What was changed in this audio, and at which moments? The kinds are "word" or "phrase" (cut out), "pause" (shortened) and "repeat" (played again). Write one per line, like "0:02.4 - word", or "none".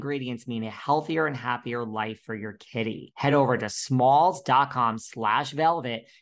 none